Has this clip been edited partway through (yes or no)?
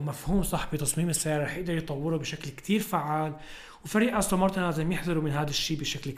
no